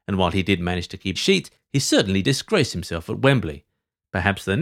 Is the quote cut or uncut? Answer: cut